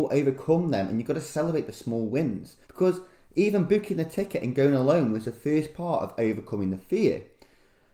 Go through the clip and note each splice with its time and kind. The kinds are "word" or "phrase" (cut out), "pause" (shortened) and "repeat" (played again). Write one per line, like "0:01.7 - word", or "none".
0:02.6 - pause